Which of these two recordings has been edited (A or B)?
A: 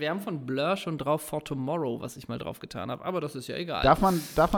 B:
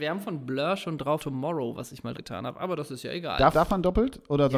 B